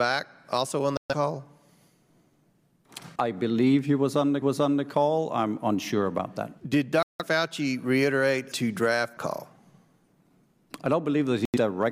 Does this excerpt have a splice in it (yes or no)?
yes